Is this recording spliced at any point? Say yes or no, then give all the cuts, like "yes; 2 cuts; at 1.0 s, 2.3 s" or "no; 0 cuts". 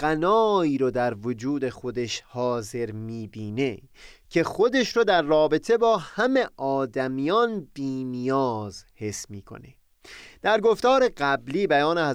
no; 0 cuts